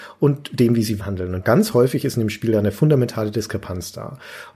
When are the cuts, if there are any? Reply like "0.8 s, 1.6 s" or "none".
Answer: 1.0 s